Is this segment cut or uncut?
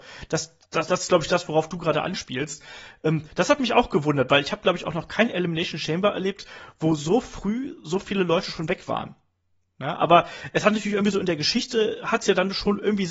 uncut